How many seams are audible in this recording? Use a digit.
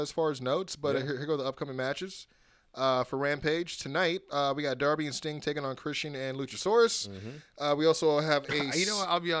0